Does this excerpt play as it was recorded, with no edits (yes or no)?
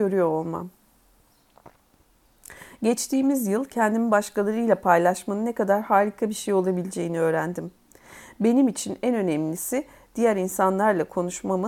yes